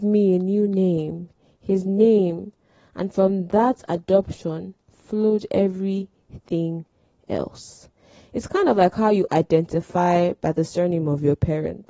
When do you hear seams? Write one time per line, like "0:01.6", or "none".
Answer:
none

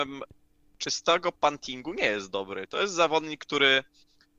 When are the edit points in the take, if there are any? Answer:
none

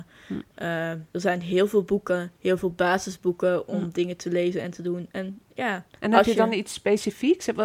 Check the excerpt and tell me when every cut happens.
0:01.1
0:02.4
0:05.9

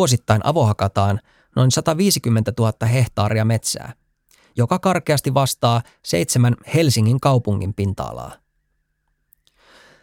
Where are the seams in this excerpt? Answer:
none

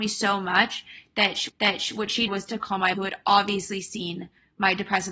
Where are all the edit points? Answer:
0:01.5
0:02.3
0:02.9

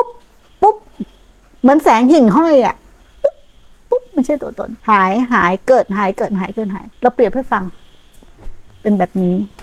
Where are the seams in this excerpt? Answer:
0:04.8
0:06.9

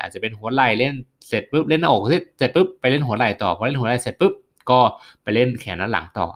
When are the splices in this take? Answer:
none

